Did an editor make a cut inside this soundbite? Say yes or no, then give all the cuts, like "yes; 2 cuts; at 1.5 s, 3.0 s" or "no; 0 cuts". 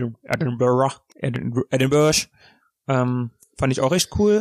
yes; 1 cut; at 1.1 s